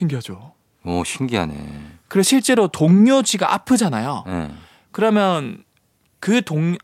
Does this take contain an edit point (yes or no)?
no